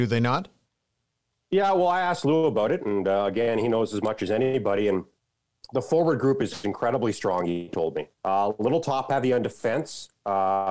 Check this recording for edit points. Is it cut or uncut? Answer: cut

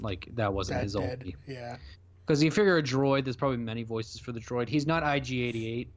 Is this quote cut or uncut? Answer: uncut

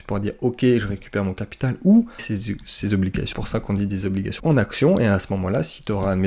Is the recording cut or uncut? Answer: cut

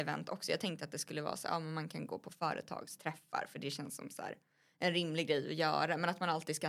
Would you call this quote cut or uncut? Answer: uncut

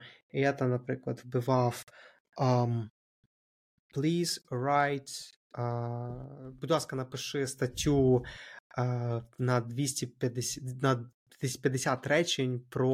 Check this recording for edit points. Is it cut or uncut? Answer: uncut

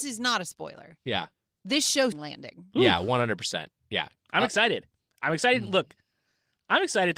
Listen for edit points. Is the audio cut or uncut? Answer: cut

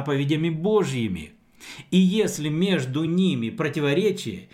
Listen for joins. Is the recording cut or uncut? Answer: uncut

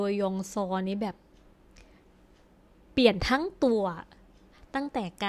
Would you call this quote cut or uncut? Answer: uncut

